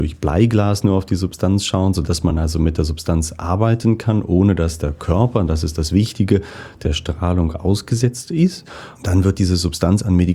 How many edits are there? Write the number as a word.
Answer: zero